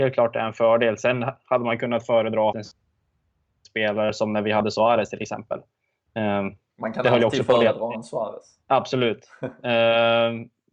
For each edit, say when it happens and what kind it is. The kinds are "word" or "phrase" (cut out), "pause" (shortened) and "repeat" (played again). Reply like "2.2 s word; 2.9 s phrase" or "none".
2.5 s phrase; 8.6 s pause